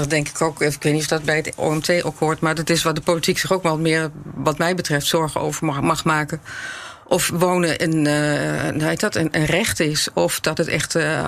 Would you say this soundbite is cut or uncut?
uncut